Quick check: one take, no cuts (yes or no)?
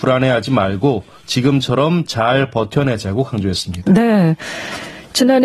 yes